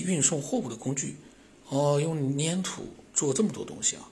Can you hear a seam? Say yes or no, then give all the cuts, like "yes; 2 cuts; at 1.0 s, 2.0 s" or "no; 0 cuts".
yes; 1 cut; at 3.1 s